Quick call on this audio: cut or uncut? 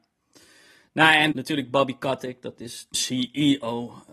cut